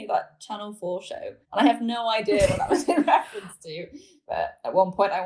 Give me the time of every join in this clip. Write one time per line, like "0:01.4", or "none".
0:01.4